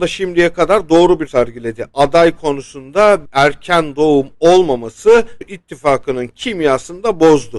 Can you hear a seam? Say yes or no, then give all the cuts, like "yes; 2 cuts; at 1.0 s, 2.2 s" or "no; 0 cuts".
yes; 3 cuts; at 1.3 s, 3.3 s, 5.4 s